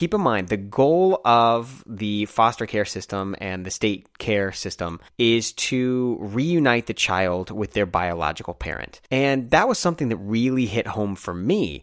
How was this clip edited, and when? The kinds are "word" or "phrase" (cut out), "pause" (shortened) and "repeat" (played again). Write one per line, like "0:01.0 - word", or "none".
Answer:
0:05.1 - pause
0:09.1 - pause